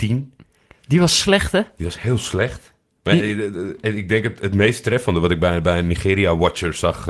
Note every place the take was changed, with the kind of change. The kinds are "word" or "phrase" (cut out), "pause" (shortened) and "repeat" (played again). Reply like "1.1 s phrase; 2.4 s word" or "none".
none